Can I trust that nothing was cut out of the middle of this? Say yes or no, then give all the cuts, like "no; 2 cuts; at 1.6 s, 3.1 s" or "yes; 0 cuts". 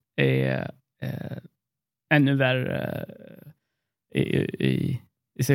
yes; 0 cuts